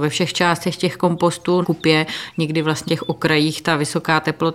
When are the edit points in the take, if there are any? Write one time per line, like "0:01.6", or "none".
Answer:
0:01.6
0:02.9